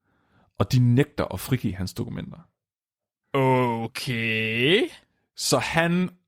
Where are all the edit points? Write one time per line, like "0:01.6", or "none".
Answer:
none